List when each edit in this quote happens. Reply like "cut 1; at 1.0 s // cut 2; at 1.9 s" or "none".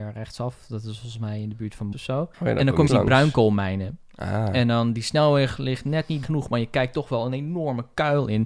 cut 1; at 1.9 s // cut 2; at 2.3 s // cut 3; at 2.9 s // cut 4; at 6.2 s